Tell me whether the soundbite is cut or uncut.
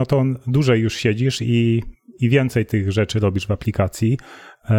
uncut